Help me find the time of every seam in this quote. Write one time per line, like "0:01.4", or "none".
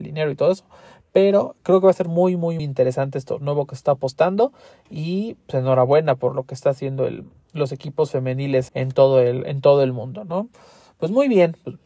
0:02.6
0:08.7